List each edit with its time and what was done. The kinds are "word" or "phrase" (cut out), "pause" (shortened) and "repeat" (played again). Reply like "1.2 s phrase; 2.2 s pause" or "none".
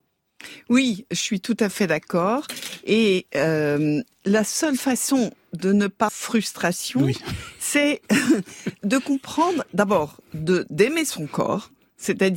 6.1 s phrase; 8.8 s word